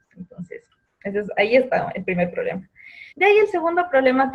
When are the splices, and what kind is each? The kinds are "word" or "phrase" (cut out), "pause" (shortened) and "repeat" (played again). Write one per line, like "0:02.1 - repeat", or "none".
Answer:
0:03.1 - pause